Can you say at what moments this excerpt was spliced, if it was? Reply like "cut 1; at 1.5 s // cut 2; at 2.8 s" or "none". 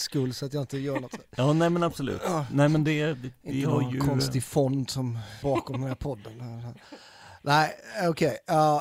cut 1; at 5.4 s